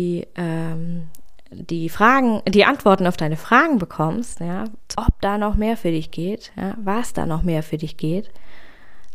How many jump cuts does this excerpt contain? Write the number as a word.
one